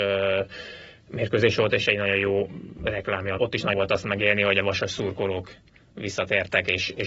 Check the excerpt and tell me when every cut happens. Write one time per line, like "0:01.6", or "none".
0:03.4
0:03.7